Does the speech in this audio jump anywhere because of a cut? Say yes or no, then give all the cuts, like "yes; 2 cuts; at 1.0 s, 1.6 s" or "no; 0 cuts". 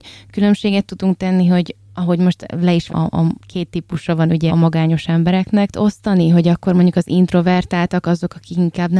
yes; 4 cuts; at 2.9 s, 3.4 s, 4.5 s, 5.7 s